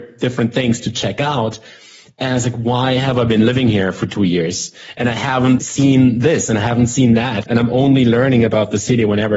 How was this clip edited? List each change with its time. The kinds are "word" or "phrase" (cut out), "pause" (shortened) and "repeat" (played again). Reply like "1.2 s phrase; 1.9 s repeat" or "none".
5.6 s word; 7.4 s word